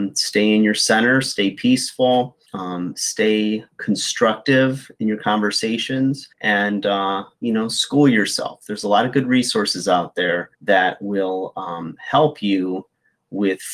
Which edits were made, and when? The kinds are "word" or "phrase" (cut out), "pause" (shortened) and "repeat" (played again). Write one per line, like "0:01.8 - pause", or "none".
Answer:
0:02.5 - pause
0:06.3 - pause
0:10.5 - pause